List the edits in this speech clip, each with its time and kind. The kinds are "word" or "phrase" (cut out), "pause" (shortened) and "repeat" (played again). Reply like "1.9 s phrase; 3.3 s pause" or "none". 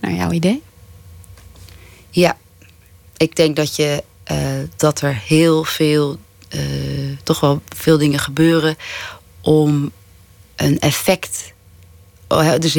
none